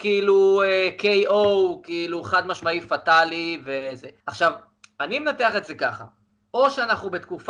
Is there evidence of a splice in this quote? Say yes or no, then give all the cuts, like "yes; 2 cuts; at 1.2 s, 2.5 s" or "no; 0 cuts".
yes; 2 cuts; at 4.2 s, 6.3 s